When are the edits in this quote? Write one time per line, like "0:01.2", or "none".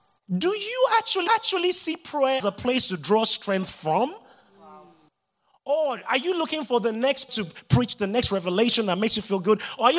0:01.3
0:02.4
0:05.1
0:07.3